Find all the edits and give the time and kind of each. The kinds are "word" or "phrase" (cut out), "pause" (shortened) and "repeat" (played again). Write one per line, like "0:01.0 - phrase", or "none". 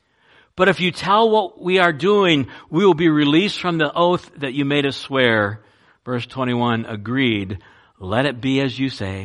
none